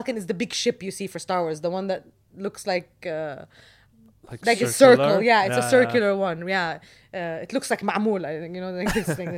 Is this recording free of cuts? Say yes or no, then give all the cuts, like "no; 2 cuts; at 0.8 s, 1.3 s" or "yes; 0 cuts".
yes; 0 cuts